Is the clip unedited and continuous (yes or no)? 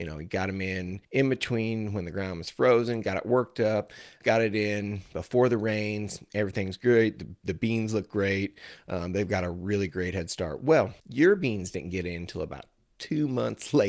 no